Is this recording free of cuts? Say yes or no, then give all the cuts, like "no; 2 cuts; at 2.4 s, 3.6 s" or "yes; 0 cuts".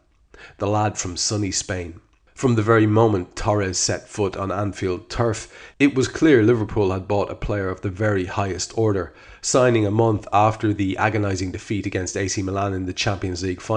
yes; 0 cuts